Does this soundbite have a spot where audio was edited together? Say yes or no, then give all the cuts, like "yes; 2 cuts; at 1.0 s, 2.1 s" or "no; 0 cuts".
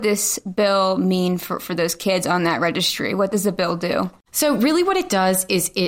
no; 0 cuts